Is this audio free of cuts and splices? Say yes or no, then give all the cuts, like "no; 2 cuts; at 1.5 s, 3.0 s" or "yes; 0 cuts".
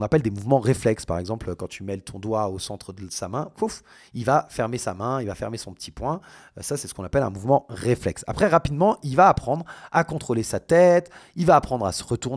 yes; 0 cuts